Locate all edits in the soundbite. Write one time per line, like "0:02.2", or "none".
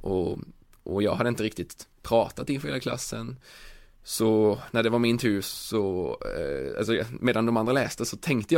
none